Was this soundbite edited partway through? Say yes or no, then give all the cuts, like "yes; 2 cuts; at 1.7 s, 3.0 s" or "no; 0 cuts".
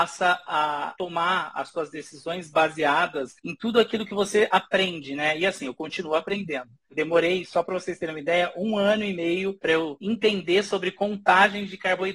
yes; 1 cut; at 3.4 s